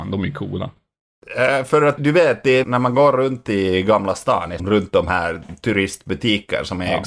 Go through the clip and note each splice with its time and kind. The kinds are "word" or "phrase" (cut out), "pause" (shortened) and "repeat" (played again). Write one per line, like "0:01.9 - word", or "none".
0:02.0 - word
0:02.6 - phrase
0:04.6 - word

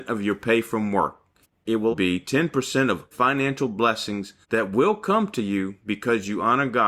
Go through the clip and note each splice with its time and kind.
0:01.4 - pause
0:01.9 - word
0:03.1 - word
0:04.4 - pause

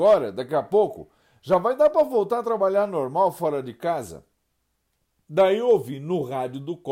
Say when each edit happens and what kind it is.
none

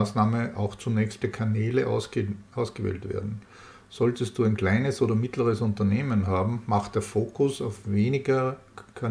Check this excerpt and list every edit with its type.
0:01.2 - word

